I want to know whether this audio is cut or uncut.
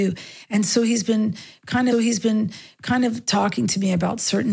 cut